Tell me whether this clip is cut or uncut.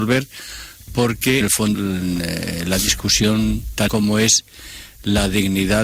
cut